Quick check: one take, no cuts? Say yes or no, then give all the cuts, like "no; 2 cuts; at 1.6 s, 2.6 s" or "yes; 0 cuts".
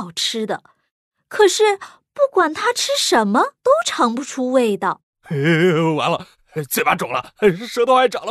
no; 1 cut; at 3.6 s